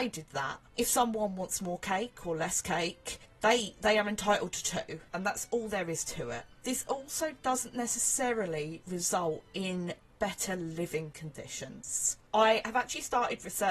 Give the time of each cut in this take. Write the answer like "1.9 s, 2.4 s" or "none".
none